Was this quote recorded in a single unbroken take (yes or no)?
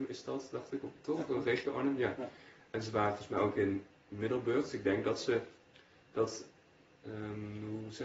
yes